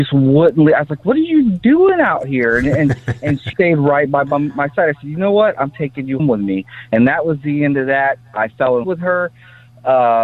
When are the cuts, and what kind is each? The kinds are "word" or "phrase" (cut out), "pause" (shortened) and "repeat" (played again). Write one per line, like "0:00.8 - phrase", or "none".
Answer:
0:03.5 - word
0:06.2 - word
0:08.8 - word